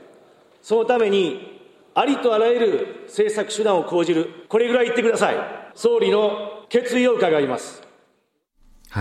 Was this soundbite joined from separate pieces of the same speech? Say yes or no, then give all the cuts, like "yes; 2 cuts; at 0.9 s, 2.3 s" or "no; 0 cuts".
yes; 3 cuts; at 4.5 s, 5.7 s, 6.6 s